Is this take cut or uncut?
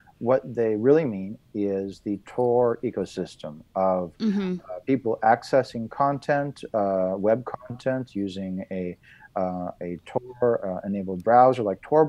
uncut